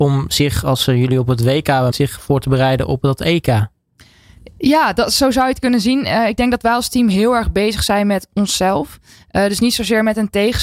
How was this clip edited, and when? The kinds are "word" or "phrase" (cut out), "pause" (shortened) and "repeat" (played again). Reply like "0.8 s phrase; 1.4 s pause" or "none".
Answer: 1.9 s word